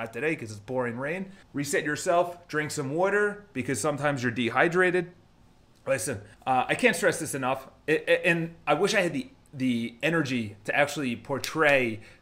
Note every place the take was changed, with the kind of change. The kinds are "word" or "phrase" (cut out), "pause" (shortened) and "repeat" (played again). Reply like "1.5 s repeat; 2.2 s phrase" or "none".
1.4 s pause; 6.3 s pause